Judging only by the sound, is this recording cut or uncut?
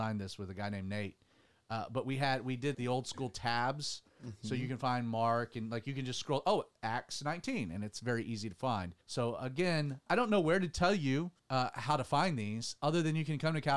cut